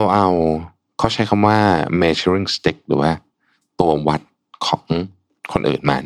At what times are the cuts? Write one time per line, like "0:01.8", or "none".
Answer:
none